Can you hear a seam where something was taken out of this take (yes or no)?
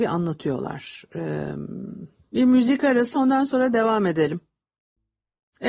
yes